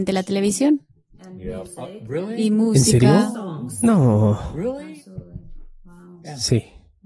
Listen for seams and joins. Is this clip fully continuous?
yes; 0 cuts

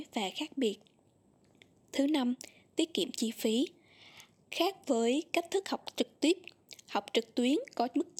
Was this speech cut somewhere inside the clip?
no; 0 cuts

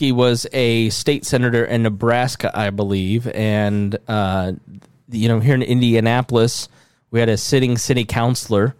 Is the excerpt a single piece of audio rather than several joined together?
yes; 0 cuts

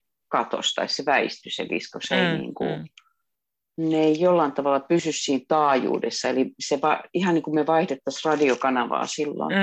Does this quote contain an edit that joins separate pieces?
no; 0 cuts

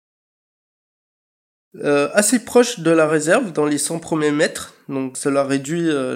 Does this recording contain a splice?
no; 0 cuts

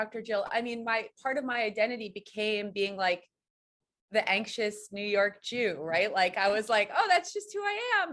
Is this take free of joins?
yes; 0 cuts

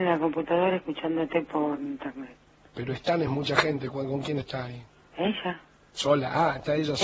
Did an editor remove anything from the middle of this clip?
no; 0 cuts

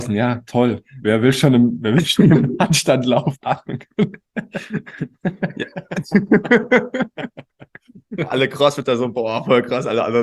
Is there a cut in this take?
no; 0 cuts

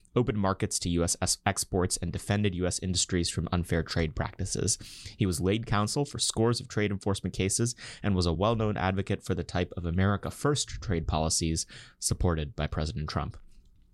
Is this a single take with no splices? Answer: yes; 0 cuts

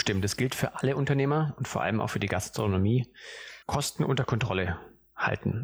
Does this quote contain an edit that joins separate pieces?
yes; 1 cut; at 3.6 s

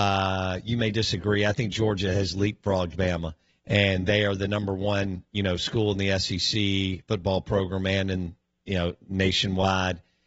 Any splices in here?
yes; 1 cut; at 3.5 s

